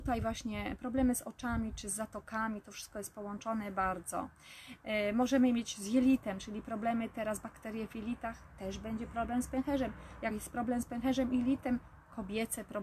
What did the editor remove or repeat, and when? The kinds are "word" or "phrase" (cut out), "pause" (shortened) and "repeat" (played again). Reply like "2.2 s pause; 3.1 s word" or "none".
none